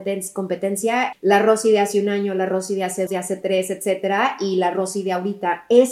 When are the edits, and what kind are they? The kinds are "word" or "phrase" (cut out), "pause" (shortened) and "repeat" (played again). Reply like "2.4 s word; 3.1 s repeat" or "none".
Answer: 1.1 s word; 3.1 s word